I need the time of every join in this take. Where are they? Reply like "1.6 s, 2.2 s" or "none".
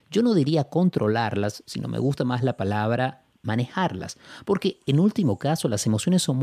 none